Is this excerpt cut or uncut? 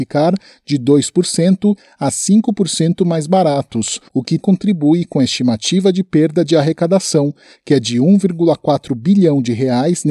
cut